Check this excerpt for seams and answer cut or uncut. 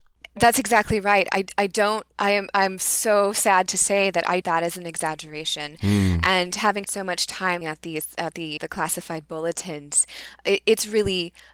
cut